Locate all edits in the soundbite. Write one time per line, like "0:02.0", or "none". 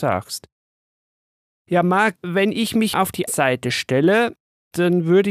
0:02.2
0:02.9
0:03.3